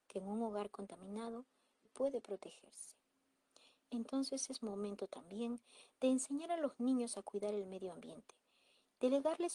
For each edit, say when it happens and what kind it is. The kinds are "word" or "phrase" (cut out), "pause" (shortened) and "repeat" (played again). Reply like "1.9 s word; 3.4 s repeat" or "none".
1.8 s word